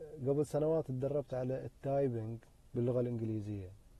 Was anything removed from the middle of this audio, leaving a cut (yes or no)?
no